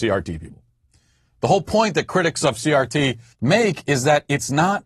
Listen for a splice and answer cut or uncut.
cut